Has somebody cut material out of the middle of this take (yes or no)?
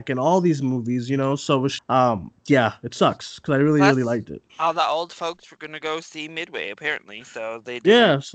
yes